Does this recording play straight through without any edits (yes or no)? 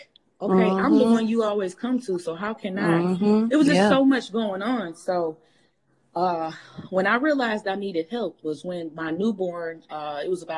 yes